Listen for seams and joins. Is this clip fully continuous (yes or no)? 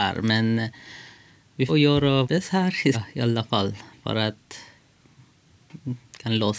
no